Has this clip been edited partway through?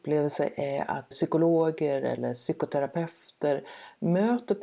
yes; 1 cut; at 1.1 s

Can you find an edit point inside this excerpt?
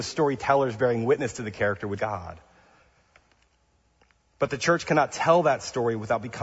yes; 1 cut; at 2.0 s

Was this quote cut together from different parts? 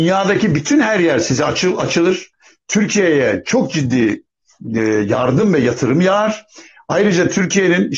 no; 0 cuts

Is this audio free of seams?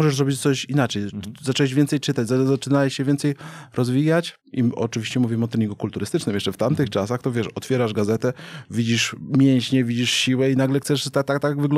no; 1 cut; at 4.4 s

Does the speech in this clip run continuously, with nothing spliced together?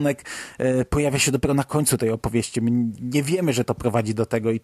yes; 0 cuts

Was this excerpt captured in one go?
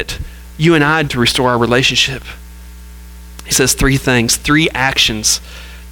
no; 2 cuts; at 1.1 s, 3.5 s

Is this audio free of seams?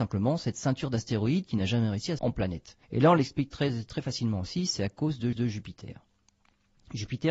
no; 3 cuts; at 2.2 s, 2.8 s, 5.3 s

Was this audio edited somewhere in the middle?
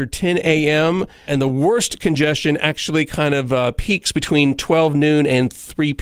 yes; 1 cut; at 1.3 s

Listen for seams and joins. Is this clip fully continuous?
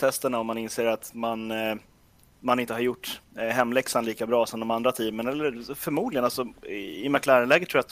yes; 0 cuts

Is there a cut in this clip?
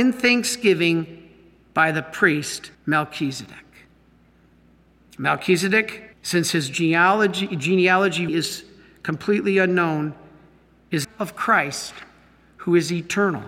yes; 4 cuts; at 2.7 s, 6.1 s, 8.3 s, 11.0 s

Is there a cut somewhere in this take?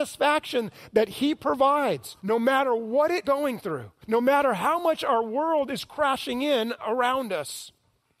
yes; 3 cuts; at 2.2 s, 3.2 s, 4.0 s

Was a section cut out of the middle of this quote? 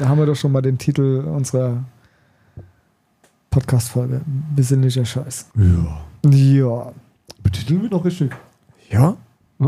yes; 2 cuts; at 5.5 s, 7.9 s

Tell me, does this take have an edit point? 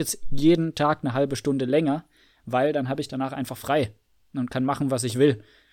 no; 0 cuts

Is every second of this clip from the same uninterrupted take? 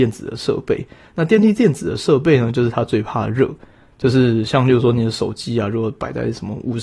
yes; 0 cuts

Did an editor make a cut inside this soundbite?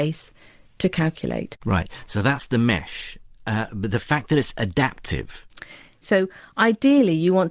no; 0 cuts

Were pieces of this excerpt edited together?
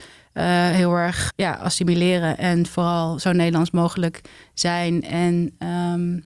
yes; 1 cut; at 1.3 s

